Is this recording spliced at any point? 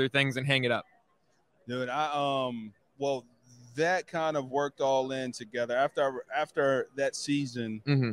yes; 1 cut; at 2.8 s

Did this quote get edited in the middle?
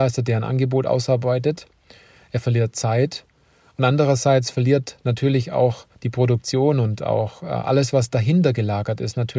yes; 1 cut; at 5.9 s

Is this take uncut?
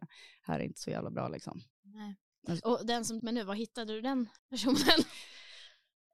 no; 3 cuts; at 1.7 s, 3.2 s, 4.4 s

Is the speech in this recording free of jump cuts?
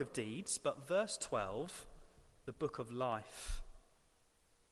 yes; 0 cuts

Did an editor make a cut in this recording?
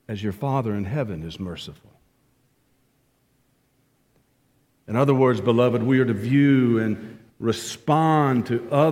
no; 0 cuts

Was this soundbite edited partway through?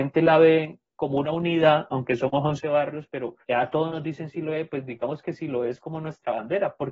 yes; 1 cut; at 3.4 s

